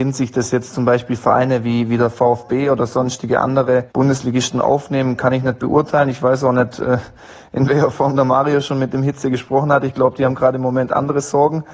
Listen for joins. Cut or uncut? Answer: cut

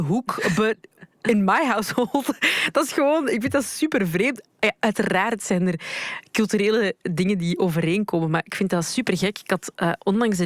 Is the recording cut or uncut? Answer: cut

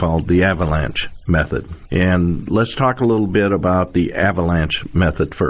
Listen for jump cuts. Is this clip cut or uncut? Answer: uncut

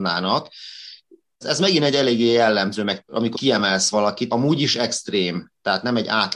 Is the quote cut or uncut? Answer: cut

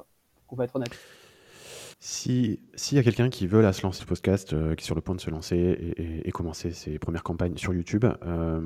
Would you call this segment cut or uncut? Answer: cut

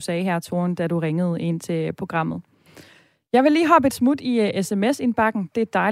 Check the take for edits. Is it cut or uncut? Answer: uncut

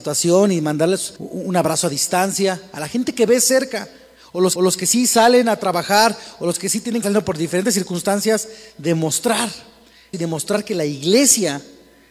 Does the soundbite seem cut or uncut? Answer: cut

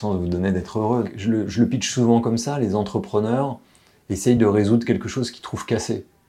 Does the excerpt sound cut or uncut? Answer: uncut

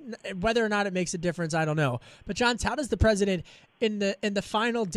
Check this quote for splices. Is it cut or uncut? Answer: cut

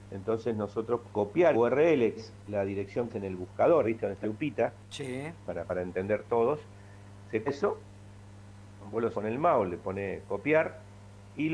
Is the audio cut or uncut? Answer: cut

